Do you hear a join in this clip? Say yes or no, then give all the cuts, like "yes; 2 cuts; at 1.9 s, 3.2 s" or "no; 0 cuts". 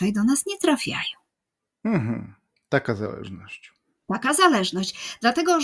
no; 0 cuts